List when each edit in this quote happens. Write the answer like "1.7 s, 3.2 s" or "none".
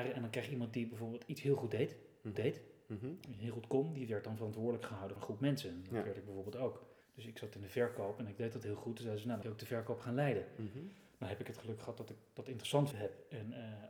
2.3 s, 5.2 s, 7.0 s, 9.4 s, 12.9 s